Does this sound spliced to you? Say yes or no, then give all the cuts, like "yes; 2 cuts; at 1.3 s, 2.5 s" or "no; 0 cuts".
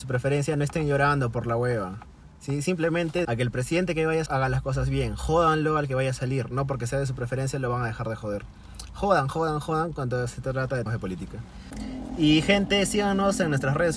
yes; 4 cuts; at 3.2 s, 4.3 s, 9.3 s, 10.9 s